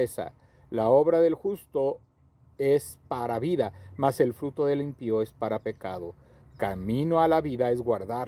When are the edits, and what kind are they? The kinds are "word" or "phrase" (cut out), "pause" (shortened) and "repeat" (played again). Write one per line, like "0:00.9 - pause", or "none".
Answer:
none